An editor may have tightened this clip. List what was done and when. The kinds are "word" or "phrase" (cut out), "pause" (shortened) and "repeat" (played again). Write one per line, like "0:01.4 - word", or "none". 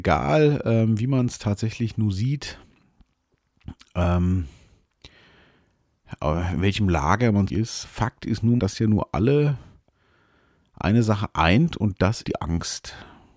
0:07.5 - word
0:07.8 - word
0:08.6 - word
0:12.2 - word